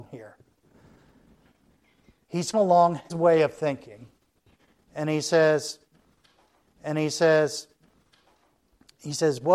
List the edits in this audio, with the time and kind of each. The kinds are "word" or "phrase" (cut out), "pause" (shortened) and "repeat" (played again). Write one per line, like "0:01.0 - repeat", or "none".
0:02.5 - word
0:03.1 - word
0:06.6 - repeat

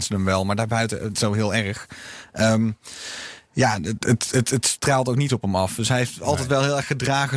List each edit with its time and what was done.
0:01.1 - word
0:04.0 - word
0:05.3 - word

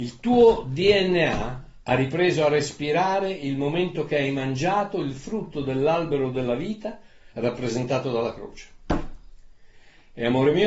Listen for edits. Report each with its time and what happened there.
0:01.8 - pause
0:07.3 - pause

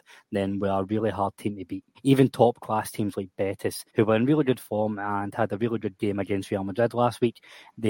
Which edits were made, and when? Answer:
0:01.9 - pause
0:03.9 - pause

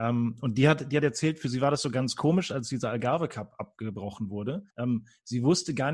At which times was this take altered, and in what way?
0:04.7 - pause

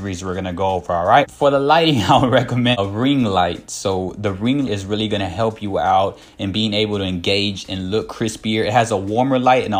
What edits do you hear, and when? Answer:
0:04.7 - word

